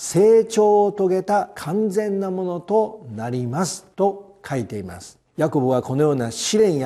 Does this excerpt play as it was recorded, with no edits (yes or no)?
no